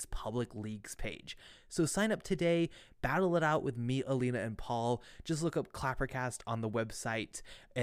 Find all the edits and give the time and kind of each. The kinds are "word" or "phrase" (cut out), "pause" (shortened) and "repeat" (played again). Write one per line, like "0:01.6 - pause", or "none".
none